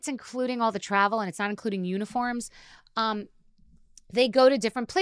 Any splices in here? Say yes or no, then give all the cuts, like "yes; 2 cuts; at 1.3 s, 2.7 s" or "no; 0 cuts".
no; 0 cuts